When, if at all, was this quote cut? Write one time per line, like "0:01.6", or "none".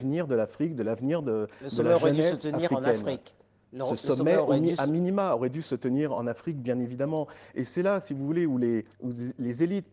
0:08.9